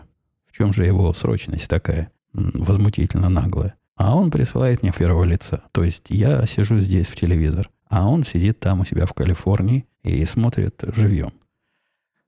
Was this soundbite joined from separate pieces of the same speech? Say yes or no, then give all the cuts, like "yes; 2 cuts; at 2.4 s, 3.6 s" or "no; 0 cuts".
yes; 7 cuts; at 2.1 s, 3.8 s, 4.9 s, 5.6 s, 7.1 s, 7.8 s, 9.9 s